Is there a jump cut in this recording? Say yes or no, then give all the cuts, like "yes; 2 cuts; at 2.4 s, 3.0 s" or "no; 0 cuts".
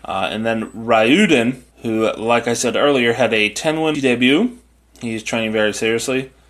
yes; 2 cuts; at 1.7 s, 3.9 s